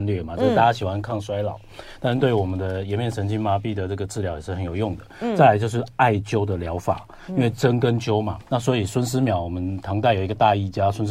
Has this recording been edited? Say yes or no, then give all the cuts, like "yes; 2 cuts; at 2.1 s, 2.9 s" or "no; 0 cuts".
yes; 1 cut; at 8.4 s